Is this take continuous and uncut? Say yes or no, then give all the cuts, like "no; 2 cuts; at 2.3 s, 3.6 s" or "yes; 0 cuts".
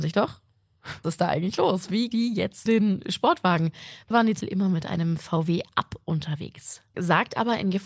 no; 6 cuts; at 1.0 s, 2.1 s, 2.7 s, 4.1 s, 4.4 s, 6.9 s